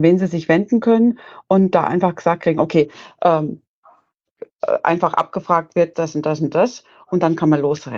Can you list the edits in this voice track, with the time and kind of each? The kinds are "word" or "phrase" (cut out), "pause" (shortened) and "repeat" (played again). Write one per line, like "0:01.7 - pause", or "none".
0:05.9 - word